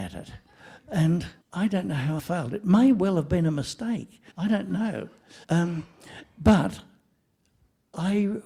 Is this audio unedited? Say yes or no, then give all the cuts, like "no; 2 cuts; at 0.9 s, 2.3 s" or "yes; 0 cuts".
no; 4 cuts; at 1.4 s, 2.2 s, 4.3 s, 5.4 s